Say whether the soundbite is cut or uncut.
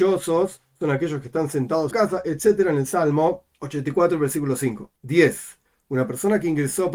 cut